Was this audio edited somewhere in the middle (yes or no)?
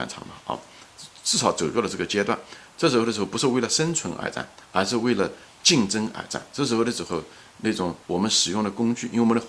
yes